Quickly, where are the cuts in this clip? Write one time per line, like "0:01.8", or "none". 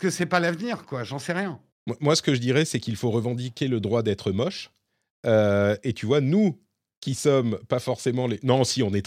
none